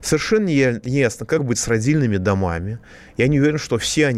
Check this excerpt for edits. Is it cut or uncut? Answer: uncut